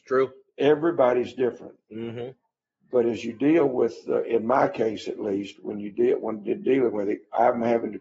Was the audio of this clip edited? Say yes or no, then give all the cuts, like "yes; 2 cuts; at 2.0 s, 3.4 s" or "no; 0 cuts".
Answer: no; 0 cuts